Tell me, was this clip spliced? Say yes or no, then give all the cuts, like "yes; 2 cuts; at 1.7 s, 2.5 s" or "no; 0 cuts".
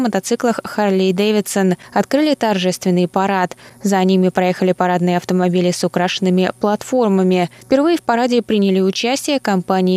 no; 0 cuts